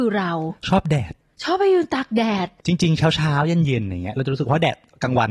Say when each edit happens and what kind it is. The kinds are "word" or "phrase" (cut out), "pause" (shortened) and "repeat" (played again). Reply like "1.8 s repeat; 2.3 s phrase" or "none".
none